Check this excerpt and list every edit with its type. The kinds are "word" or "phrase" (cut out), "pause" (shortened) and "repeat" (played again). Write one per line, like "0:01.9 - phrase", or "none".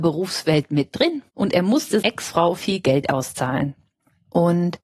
0:01.3 - pause
0:02.0 - word
0:02.6 - word